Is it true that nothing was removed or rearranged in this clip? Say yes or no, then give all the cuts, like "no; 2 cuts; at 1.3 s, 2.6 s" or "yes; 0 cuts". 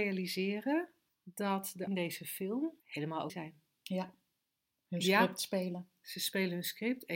no; 4 cuts; at 1.1 s, 1.9 s, 2.8 s, 3.3 s